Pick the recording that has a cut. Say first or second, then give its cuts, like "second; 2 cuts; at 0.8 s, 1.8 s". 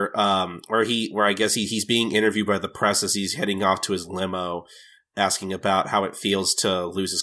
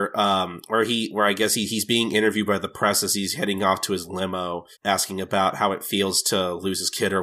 second; 1 cut; at 4.7 s